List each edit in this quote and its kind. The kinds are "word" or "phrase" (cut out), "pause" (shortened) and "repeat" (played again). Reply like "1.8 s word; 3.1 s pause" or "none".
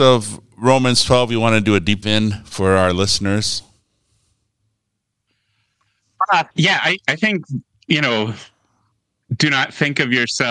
2.0 s word; 6.5 s pause; 7.7 s pause